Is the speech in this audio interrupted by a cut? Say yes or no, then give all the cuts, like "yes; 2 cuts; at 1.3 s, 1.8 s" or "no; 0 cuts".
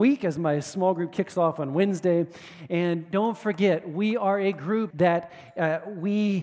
yes; 1 cut; at 4.9 s